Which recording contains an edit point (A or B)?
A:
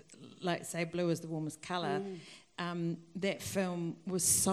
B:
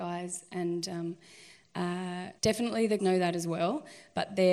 B